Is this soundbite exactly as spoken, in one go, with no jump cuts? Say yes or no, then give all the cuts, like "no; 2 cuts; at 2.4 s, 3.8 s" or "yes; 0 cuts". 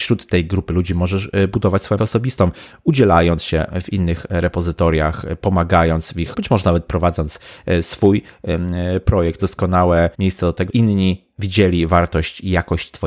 no; 5 cuts; at 2.0 s, 6.3 s, 9.4 s, 10.1 s, 10.7 s